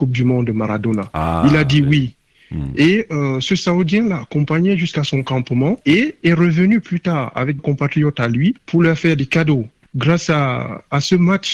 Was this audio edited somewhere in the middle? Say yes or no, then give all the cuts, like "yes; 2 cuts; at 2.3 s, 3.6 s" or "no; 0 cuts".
yes; 4 cuts; at 5.8 s, 7.6 s, 8.6 s, 9.8 s